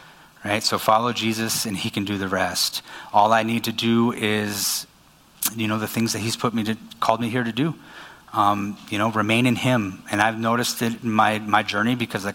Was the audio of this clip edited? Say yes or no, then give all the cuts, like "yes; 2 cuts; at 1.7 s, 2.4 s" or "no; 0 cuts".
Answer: no; 0 cuts